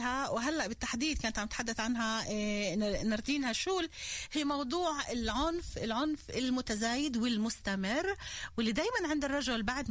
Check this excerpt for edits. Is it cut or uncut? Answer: uncut